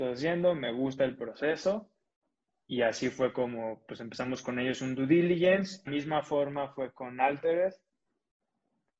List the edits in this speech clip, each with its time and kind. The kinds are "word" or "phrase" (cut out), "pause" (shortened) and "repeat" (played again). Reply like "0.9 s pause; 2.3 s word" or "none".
2.3 s pause; 5.9 s phrase